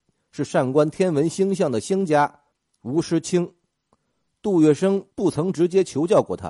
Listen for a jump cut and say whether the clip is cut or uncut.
cut